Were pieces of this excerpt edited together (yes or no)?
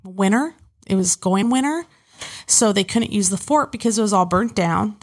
yes